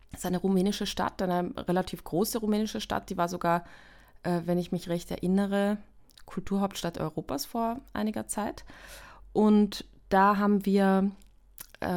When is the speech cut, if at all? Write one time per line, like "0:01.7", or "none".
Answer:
none